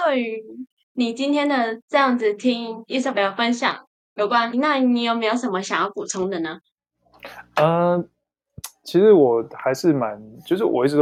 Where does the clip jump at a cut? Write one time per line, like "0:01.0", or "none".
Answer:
0:04.5